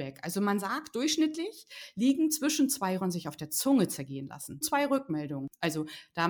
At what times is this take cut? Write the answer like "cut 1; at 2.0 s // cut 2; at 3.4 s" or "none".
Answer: cut 1; at 3.0 s // cut 2; at 4.6 s